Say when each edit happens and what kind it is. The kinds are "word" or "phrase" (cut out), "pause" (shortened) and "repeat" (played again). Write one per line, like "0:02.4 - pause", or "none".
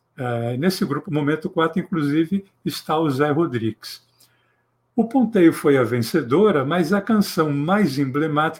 0:01.1 - word